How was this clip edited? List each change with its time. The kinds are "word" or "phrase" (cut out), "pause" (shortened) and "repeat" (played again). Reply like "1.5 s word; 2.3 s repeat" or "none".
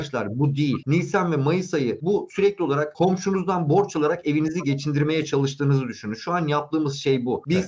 none